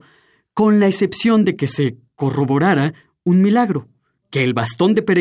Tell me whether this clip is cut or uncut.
uncut